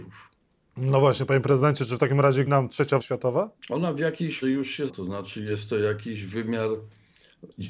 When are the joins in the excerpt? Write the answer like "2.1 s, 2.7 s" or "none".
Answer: 2.5 s, 3.0 s, 3.6 s, 4.4 s, 4.9 s

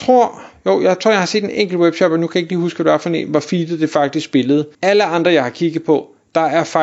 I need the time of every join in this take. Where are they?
4.7 s

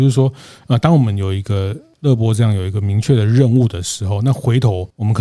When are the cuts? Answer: none

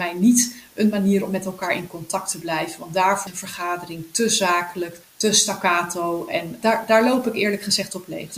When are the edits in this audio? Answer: 3.3 s, 5.0 s, 6.6 s

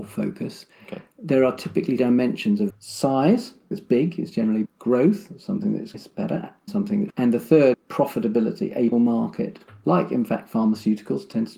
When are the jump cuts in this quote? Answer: 2.0 s, 2.7 s, 3.7 s, 4.6 s, 5.9 s, 6.7 s, 7.1 s, 7.7 s, 8.9 s

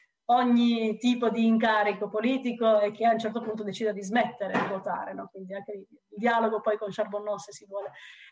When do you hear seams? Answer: 6.0 s

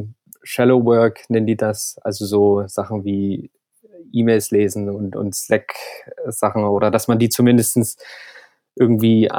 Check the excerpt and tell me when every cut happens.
none

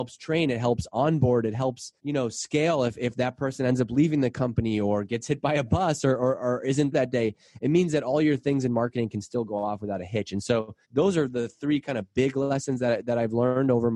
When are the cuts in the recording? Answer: 2.0 s, 6.9 s, 10.8 s

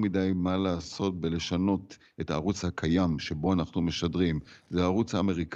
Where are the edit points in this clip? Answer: none

